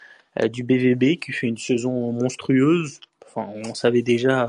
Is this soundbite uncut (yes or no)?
yes